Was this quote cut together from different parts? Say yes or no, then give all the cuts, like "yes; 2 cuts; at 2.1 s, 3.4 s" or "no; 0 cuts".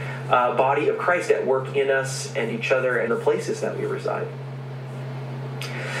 yes; 1 cut; at 3.1 s